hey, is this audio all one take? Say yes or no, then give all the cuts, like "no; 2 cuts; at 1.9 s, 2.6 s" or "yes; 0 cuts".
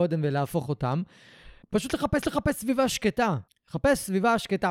no; 3 cuts; at 1.6 s, 2.2 s, 3.5 s